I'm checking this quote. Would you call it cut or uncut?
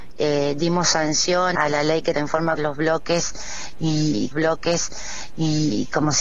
cut